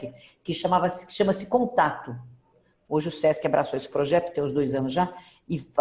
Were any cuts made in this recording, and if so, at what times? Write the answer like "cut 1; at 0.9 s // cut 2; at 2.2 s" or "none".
none